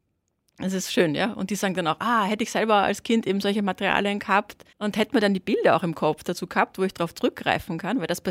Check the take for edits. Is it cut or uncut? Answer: cut